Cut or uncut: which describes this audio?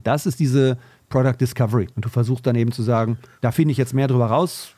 cut